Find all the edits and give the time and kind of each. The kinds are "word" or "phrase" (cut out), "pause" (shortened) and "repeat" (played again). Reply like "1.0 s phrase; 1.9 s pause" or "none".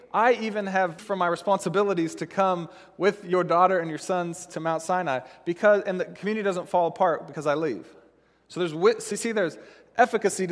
1.0 s word